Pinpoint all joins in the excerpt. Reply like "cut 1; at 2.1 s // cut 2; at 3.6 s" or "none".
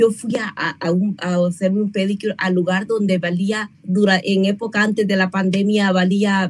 cut 1; at 3.8 s